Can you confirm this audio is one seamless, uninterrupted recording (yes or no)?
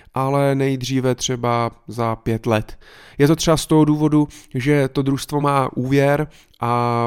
yes